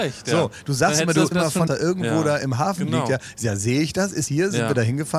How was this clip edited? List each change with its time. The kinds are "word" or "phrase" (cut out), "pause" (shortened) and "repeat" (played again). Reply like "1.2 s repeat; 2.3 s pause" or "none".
1.3 s phrase; 1.7 s phrase; 4.3 s word

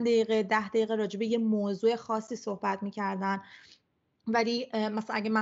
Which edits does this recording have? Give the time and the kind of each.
none

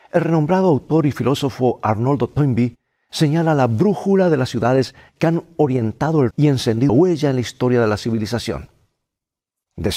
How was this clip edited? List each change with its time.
6.3 s word; 6.9 s word

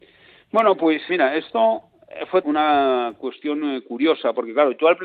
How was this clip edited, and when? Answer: 1.1 s word; 2.4 s word

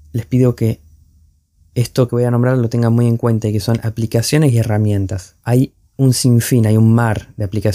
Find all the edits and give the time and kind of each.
5.4 s pause

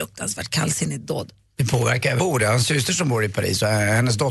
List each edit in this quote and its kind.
2.2 s phrase

